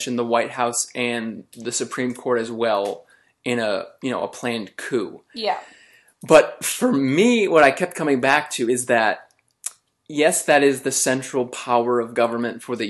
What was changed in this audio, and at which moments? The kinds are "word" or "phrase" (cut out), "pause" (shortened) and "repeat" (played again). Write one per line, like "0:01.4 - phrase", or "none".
none